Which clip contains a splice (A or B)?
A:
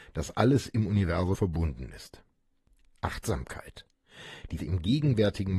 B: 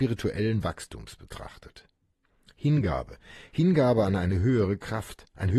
A